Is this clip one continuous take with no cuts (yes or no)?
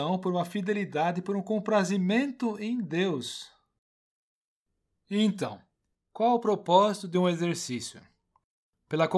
yes